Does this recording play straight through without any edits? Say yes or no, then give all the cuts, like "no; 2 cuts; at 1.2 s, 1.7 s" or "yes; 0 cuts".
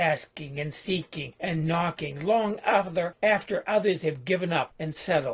yes; 0 cuts